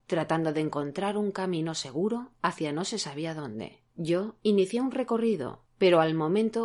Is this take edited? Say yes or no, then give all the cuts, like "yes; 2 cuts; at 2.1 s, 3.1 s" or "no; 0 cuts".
yes; 1 cut; at 3.9 s